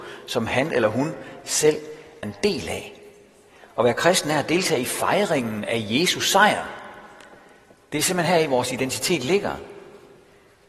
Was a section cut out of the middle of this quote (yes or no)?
yes